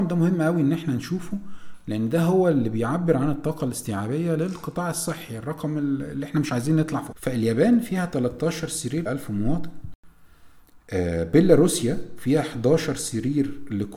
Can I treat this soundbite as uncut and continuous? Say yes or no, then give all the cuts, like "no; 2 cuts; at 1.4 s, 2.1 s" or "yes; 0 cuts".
no; 2 cuts; at 7.1 s, 9.1 s